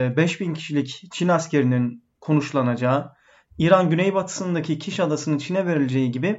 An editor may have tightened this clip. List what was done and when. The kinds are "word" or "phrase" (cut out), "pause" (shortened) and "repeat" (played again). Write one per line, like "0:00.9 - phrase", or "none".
none